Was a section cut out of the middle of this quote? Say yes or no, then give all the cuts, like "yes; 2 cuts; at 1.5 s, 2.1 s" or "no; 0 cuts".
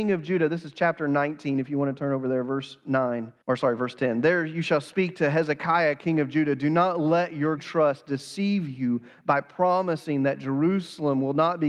yes; 2 cuts; at 3.4 s, 7.6 s